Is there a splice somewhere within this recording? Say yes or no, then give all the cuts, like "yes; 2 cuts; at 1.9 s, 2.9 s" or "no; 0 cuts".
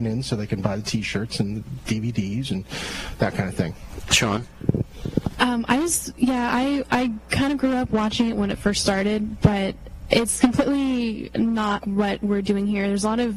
yes; 1 cut; at 11.8 s